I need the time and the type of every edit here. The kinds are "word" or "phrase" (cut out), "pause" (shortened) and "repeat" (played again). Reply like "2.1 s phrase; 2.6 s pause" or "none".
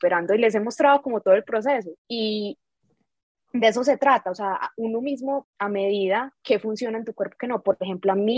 2.0 s pause; 5.4 s phrase